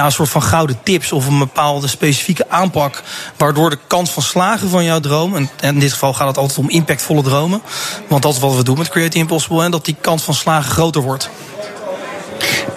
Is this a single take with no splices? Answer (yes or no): yes